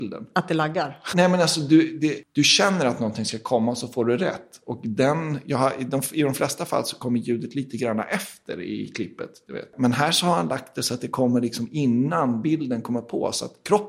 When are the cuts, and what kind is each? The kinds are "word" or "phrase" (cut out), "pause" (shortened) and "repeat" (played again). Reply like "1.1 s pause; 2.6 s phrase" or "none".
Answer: none